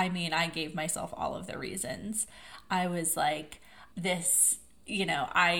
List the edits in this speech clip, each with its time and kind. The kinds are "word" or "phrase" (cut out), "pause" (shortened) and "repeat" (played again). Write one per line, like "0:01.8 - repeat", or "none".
0:03.9 - pause